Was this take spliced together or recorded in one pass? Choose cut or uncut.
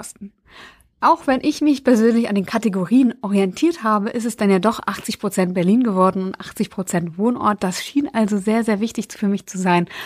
uncut